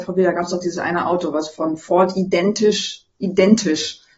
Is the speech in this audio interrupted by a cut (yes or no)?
no